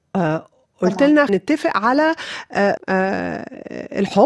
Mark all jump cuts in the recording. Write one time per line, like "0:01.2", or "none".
0:01.3
0:02.8